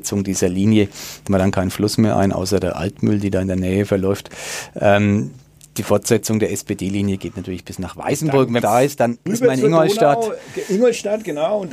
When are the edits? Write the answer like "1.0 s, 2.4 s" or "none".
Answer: 1.3 s, 8.6 s, 9.3 s